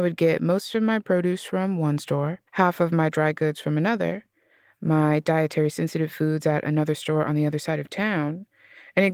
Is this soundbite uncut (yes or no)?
no